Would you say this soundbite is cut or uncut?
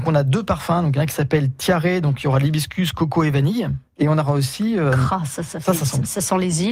cut